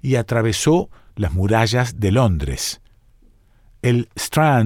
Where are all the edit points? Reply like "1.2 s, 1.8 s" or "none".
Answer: none

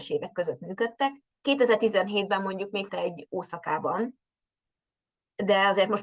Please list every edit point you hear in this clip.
1.3 s, 2.9 s

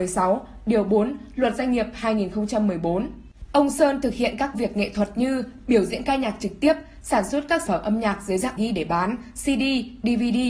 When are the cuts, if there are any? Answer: 4.5 s, 7.7 s, 8.6 s

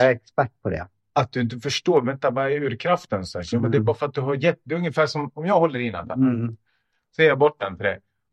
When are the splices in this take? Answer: none

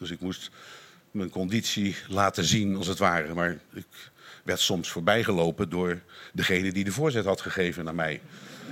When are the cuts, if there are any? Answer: none

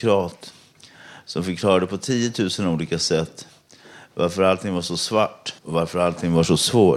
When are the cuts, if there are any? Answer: 5.6 s

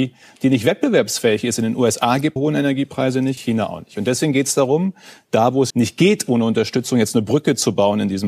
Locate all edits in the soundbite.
2.4 s, 3.4 s, 5.7 s

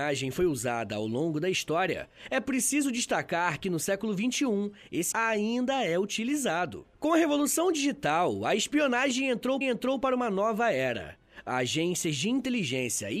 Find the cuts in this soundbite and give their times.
5.1 s, 6.9 s, 9.6 s

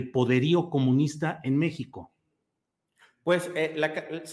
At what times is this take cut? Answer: none

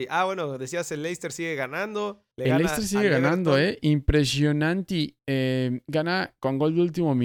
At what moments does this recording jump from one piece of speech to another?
2.3 s, 5.2 s

